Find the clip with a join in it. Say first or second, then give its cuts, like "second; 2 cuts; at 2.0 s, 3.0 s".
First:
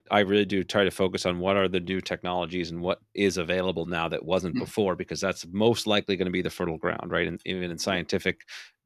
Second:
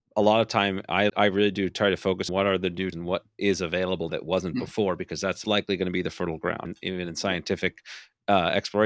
second; 6 cuts; at 1.1 s, 2.3 s, 2.9 s, 4.1 s, 5.4 s, 6.7 s